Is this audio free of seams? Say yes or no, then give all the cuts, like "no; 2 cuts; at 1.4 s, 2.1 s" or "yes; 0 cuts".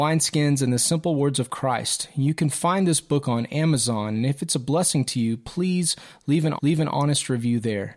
no; 1 cut; at 6.6 s